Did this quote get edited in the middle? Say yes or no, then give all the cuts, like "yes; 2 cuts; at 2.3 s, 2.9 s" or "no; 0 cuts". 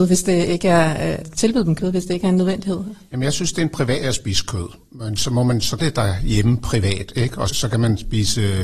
yes; 4 cuts; at 1.2 s, 4.0 s, 5.8 s, 7.5 s